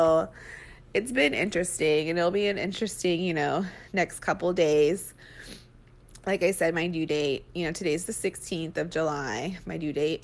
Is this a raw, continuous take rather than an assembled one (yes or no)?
yes